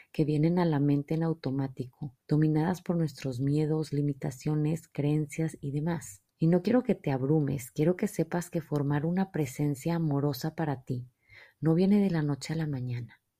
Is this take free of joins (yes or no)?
no